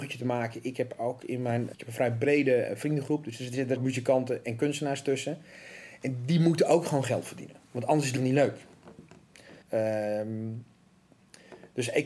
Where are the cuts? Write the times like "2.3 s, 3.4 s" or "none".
1.7 s, 3.8 s, 7.6 s, 8.2 s, 9.6 s